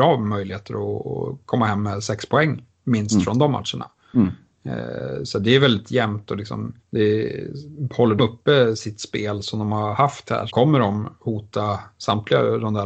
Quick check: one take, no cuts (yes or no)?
no